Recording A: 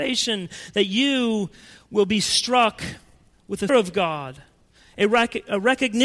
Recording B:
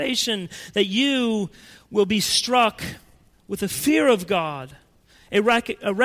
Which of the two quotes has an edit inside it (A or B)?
A